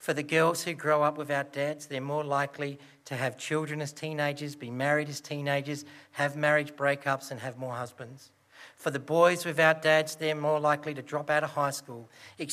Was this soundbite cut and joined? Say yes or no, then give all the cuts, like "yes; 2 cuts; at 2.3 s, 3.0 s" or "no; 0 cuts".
no; 0 cuts